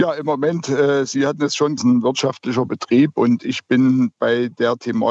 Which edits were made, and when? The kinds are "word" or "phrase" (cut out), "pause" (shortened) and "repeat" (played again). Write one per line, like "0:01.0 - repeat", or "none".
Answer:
0:01.8 - phrase